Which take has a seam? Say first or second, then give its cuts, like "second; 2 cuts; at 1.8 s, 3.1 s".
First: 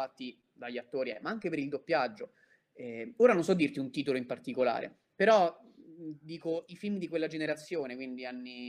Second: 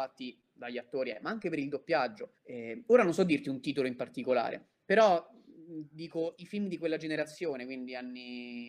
second; 1 cut; at 2.4 s